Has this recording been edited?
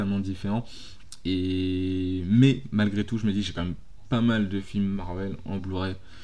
no; 0 cuts

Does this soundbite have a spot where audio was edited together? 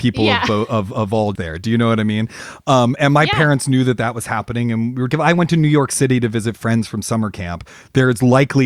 yes; 3 cuts; at 1.4 s, 3.0 s, 5.1 s

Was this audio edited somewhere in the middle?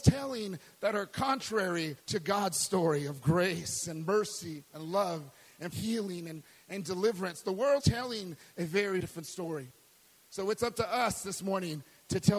yes; 4 cuts; at 2.0 s, 5.7 s, 7.8 s, 9.0 s

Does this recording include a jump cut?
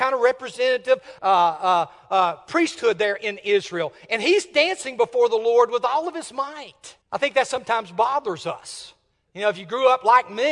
yes; 2 cuts; at 1.2 s, 7.0 s

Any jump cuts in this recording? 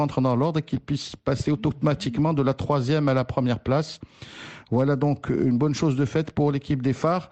no; 0 cuts

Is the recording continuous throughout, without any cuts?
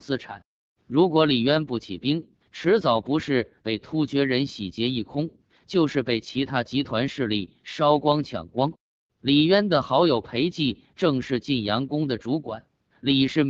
yes; 0 cuts

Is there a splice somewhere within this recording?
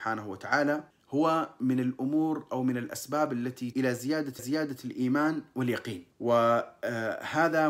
yes; 4 cuts; at 0.9 s, 3.7 s, 4.4 s, 6.1 s

